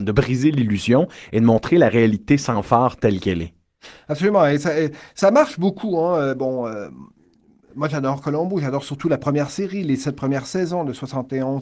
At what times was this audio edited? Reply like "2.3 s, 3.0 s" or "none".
none

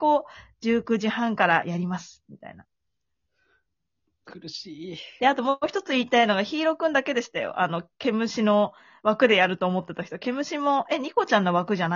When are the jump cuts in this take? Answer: none

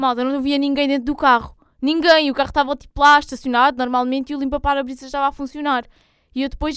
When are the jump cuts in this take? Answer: none

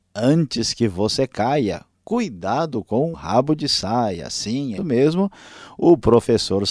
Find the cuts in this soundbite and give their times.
3.1 s, 4.8 s

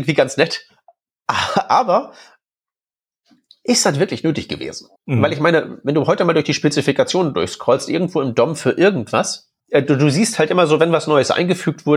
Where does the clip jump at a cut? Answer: 5.0 s, 9.6 s

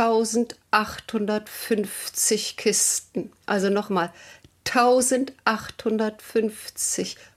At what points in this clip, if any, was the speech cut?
3.4 s

